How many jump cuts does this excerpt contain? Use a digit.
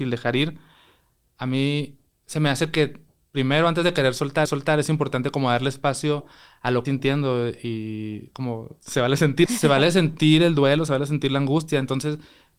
3